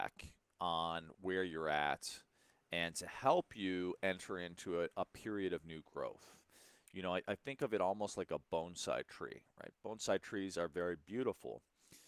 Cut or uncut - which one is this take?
uncut